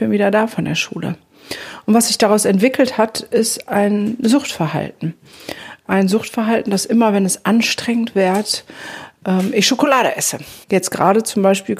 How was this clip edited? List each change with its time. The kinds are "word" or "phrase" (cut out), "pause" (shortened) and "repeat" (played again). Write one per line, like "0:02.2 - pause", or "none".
0:10.6 - pause

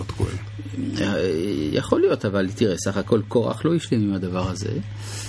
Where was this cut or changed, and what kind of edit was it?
none

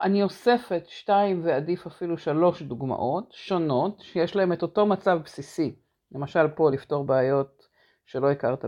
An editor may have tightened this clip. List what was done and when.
none

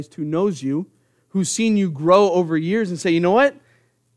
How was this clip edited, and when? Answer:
none

